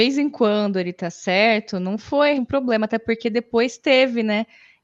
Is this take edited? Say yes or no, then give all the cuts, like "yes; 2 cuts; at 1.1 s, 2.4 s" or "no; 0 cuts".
yes; 1 cut; at 2.4 s